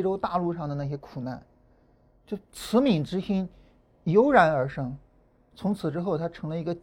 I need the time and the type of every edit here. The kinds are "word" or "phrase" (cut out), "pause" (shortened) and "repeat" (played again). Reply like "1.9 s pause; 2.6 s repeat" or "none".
none